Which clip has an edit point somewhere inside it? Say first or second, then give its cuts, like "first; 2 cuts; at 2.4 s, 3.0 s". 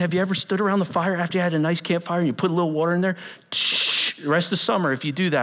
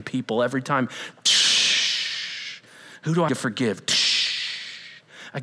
second; 1 cut; at 3.3 s